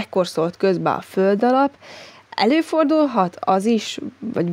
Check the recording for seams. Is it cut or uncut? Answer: uncut